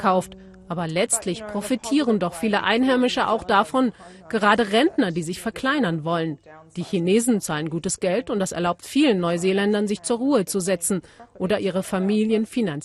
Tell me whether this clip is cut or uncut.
uncut